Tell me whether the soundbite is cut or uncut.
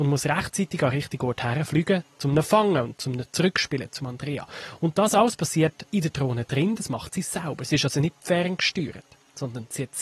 cut